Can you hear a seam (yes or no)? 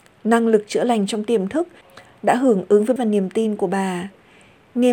yes